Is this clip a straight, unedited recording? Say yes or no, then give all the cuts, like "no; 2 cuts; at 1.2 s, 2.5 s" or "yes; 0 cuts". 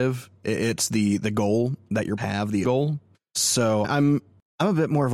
no; 3 cuts; at 2.2 s, 2.6 s, 3.8 s